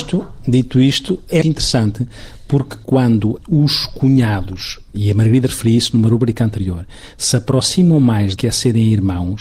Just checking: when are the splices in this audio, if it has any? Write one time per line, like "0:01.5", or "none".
0:01.4
0:08.4